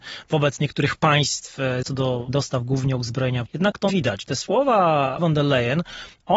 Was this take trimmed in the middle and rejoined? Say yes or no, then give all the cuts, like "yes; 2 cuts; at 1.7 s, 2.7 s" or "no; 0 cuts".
yes; 5 cuts; at 1.8 s, 2.3 s, 3.5 s, 3.9 s, 5.2 s